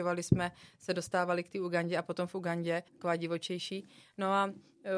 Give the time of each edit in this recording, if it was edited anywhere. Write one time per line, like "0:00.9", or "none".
0:02.9